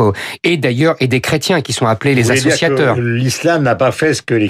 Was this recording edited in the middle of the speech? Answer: no; 0 cuts

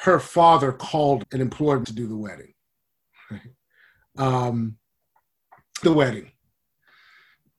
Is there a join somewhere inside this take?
yes; 3 cuts; at 1.2 s, 1.8 s, 5.8 s

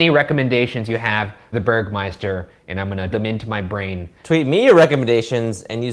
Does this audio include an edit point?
yes; 2 cuts; at 1.5 s, 3.1 s

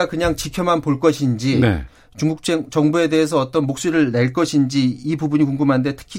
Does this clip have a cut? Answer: no; 0 cuts

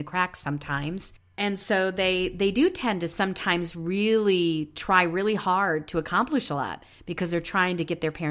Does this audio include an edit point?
no; 0 cuts

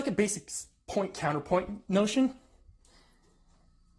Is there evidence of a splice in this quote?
no; 0 cuts

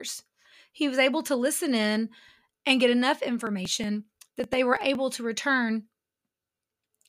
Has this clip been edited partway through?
no; 0 cuts

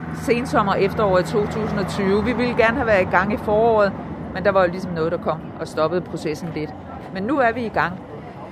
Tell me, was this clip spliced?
no; 0 cuts

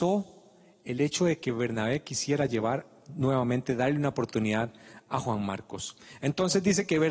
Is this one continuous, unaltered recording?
yes; 0 cuts

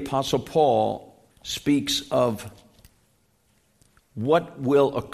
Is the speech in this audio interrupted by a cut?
yes; 1 cut; at 1.3 s

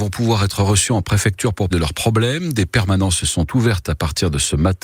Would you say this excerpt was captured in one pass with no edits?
no; 1 cut; at 1.7 s

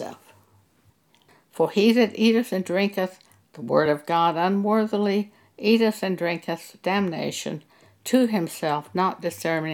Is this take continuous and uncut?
yes; 0 cuts

